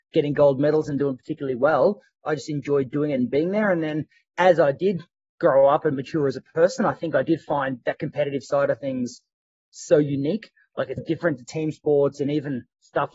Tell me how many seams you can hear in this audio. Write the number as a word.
one